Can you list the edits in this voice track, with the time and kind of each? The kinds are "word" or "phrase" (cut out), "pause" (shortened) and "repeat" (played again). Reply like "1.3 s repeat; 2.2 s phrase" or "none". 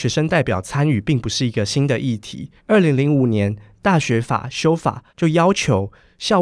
2.6 s pause; 5.1 s pause

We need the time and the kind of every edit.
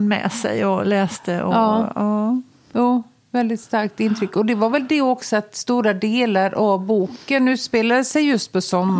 none

